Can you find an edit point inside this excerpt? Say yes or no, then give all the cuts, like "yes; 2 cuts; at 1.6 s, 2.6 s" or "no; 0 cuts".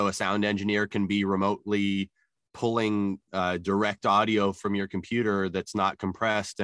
no; 0 cuts